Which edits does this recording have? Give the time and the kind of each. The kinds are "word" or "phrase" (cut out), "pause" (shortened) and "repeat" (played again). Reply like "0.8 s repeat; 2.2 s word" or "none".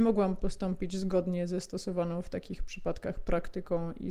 none